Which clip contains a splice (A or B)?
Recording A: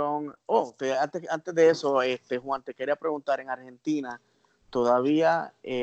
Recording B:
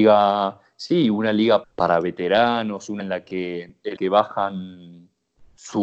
B